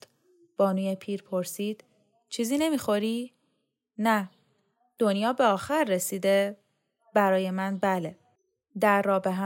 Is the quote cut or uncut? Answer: uncut